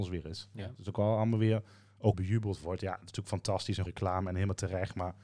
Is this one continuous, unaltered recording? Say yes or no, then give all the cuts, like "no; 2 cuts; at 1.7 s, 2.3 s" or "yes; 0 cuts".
no; 2 cuts; at 2.1 s, 3.9 s